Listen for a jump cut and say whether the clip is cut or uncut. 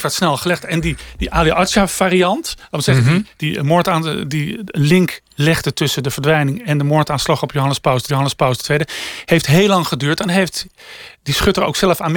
cut